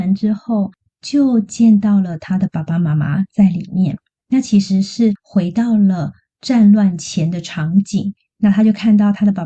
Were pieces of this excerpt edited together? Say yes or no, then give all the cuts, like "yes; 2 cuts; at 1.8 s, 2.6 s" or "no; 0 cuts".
no; 0 cuts